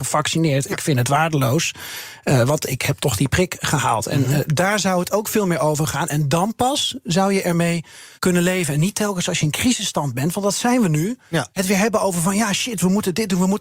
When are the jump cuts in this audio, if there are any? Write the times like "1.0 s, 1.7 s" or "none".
8.2 s, 11.5 s